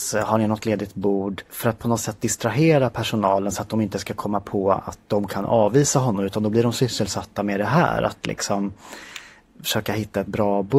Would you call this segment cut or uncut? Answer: cut